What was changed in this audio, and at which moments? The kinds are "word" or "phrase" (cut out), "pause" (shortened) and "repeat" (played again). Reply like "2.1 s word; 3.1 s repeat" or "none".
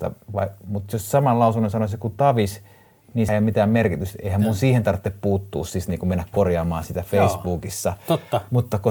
3.3 s word